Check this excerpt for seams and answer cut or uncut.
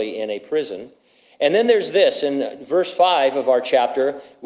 uncut